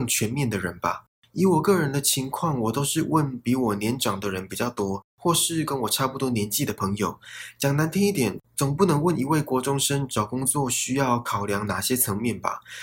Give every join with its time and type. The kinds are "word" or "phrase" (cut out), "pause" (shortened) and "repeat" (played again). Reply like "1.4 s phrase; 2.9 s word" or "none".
none